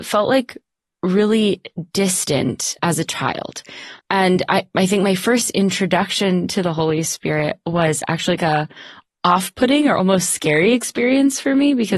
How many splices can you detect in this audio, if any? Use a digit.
3